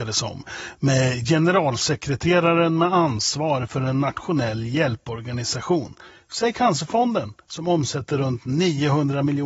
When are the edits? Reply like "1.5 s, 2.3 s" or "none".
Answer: none